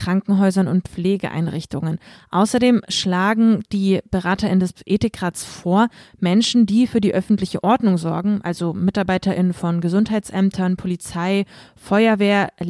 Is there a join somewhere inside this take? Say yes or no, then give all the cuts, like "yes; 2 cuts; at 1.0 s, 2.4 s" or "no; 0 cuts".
no; 0 cuts